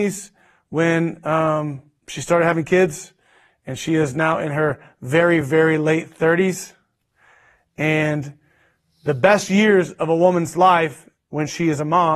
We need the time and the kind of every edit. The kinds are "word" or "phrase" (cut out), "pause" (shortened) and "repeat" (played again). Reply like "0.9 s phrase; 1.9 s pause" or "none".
none